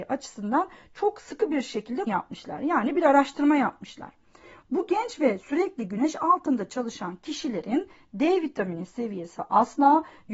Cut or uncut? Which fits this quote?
cut